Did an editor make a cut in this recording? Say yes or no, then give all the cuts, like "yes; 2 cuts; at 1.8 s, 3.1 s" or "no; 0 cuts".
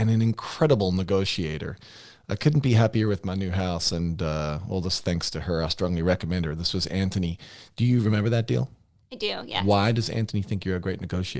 no; 0 cuts